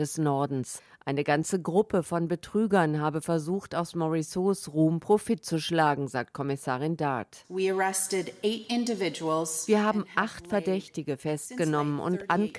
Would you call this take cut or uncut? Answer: uncut